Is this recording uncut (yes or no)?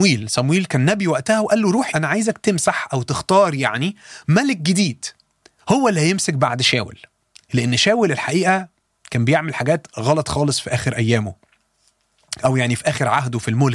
no